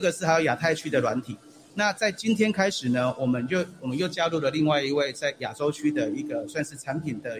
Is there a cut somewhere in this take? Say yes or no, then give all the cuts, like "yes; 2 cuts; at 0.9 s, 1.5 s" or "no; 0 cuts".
no; 0 cuts